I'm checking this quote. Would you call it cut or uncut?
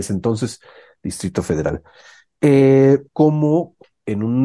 cut